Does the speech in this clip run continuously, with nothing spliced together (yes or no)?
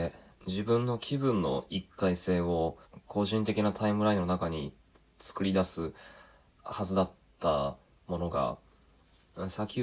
yes